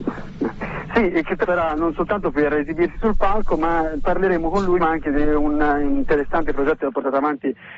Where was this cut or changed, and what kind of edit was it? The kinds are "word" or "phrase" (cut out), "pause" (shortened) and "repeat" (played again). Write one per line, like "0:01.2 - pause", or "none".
0:01.4 - word
0:04.8 - word